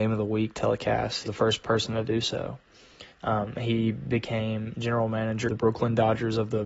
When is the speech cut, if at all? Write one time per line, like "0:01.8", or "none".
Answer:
0:01.2
0:01.6
0:03.1
0:05.5